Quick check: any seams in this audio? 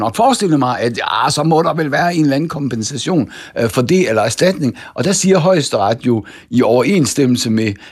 no; 0 cuts

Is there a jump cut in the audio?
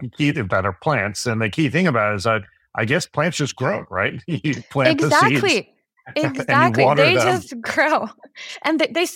no; 0 cuts

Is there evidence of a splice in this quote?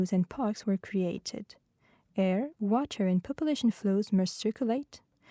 no; 0 cuts

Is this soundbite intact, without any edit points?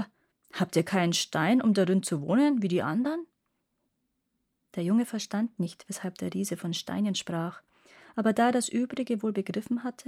yes; 0 cuts

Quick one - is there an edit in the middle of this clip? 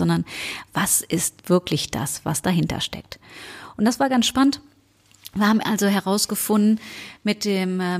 no; 0 cuts

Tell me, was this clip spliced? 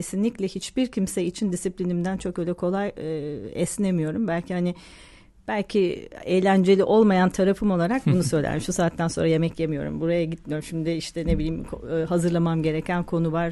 no; 0 cuts

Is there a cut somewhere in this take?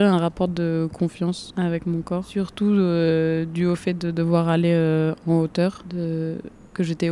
no; 0 cuts

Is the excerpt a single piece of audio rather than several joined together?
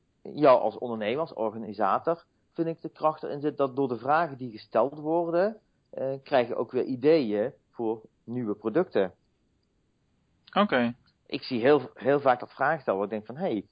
yes; 0 cuts

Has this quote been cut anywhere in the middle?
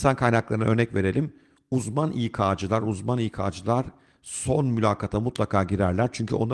no; 0 cuts

